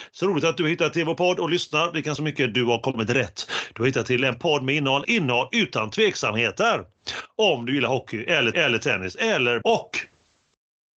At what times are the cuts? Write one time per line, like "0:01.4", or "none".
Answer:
0:02.2
0:05.0
0:08.5
0:09.6